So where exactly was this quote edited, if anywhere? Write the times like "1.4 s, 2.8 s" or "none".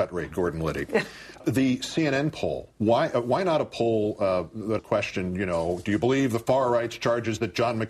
1.4 s, 2.7 s, 4.8 s